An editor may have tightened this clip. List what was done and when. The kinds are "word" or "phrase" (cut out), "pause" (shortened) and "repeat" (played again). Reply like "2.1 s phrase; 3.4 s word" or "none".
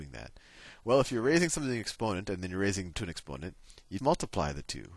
2.9 s word; 4.0 s word